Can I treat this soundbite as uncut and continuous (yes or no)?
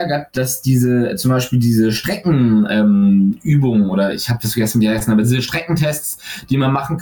yes